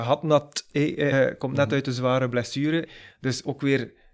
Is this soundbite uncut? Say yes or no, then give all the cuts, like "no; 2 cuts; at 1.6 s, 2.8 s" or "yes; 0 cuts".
no; 1 cut; at 1.1 s